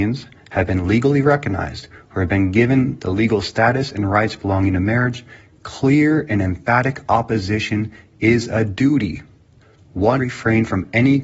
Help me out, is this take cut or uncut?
cut